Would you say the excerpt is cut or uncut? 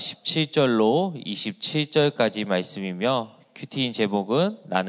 uncut